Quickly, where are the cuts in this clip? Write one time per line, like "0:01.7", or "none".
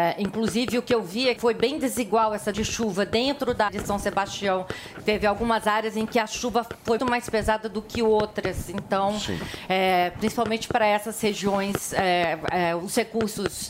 0:01.4
0:02.5
0:03.7
0:07.0